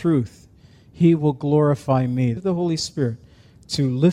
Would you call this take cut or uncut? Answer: cut